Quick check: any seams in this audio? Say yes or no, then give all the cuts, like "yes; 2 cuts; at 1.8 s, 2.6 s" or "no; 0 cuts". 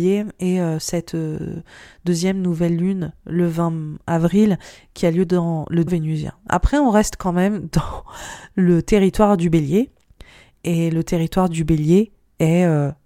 yes; 1 cut; at 5.9 s